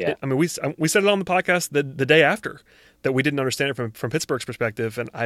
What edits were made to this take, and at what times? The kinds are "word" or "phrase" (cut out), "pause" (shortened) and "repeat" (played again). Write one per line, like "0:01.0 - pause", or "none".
none